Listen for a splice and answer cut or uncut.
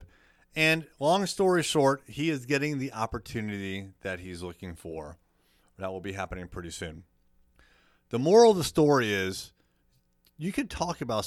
uncut